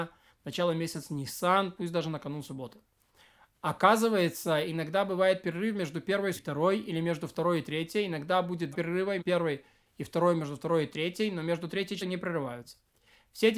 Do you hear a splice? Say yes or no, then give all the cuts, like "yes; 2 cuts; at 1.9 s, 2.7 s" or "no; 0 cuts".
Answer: yes; 4 cuts; at 6.3 s, 8.7 s, 9.2 s, 12.0 s